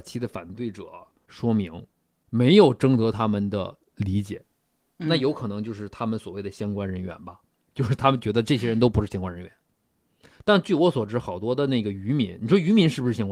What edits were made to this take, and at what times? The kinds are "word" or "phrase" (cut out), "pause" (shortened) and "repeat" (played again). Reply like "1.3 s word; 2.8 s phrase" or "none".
none